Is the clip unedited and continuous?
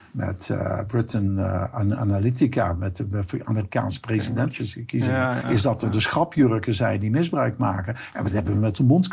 no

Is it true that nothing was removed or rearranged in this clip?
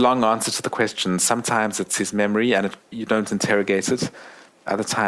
no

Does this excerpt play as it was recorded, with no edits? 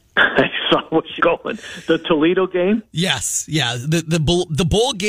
no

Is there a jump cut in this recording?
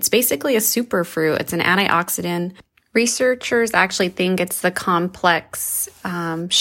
no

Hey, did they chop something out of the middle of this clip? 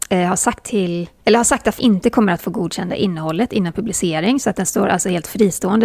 yes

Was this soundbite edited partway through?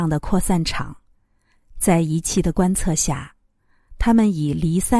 no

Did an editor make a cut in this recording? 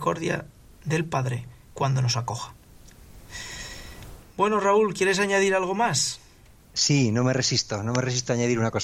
no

